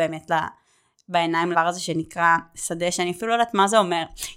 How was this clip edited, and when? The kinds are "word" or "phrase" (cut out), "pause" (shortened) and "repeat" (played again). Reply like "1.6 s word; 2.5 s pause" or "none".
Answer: 1.5 s word